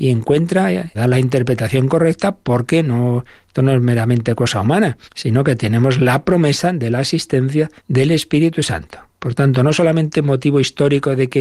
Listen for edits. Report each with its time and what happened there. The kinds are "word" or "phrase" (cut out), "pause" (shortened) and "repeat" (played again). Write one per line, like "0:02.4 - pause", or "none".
0:00.9 - phrase
0:05.1 - pause
0:07.8 - pause

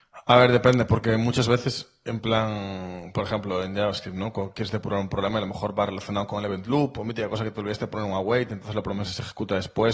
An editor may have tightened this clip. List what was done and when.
none

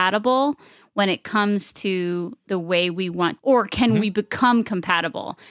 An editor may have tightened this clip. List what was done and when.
0:03.4 - phrase

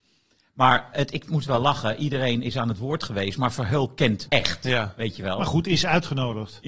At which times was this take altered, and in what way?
0:00.9 - word
0:04.3 - word

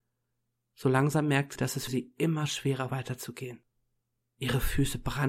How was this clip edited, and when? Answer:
0:01.6 - word
0:01.9 - word
0:02.9 - word

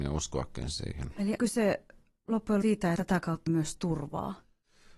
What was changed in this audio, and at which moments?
0:01.4 - word
0:02.6 - word
0:03.0 - word
0:03.5 - word

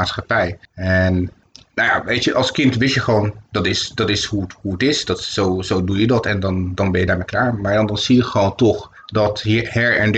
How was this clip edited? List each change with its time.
none

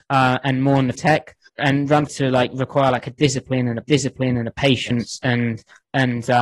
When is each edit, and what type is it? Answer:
0:00.9 - word
0:01.5 - word
0:02.1 - word
0:03.8 - repeat

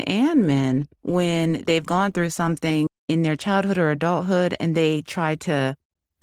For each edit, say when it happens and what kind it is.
0:00.9 - pause
0:04.7 - word

